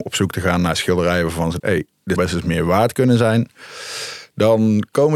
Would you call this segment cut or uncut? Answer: cut